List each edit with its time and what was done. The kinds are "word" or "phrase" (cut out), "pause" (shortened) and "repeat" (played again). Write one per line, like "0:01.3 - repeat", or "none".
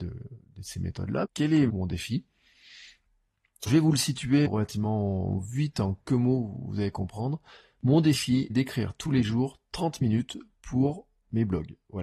0:01.2 - word
0:01.7 - word
0:03.7 - word
0:04.5 - word
0:06.1 - word
0:08.5 - word